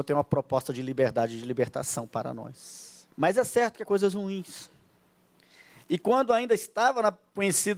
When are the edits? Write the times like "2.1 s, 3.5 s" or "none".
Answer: 3.1 s, 3.8 s